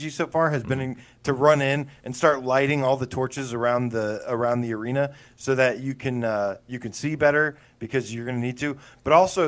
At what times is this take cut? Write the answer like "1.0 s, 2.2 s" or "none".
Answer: none